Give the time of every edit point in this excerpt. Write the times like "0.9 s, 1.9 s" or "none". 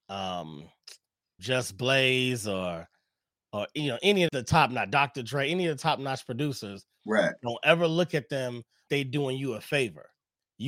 1.4 s, 4.3 s, 8.9 s